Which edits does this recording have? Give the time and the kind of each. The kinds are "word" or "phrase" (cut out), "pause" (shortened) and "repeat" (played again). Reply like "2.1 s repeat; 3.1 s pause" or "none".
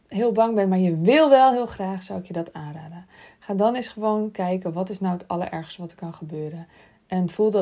none